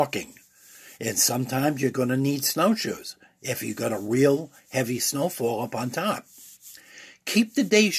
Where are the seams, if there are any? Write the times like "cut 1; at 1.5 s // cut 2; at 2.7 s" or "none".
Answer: none